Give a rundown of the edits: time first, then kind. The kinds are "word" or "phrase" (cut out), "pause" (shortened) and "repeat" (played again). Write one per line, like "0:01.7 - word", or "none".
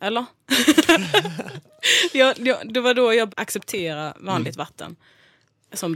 0:03.3 - word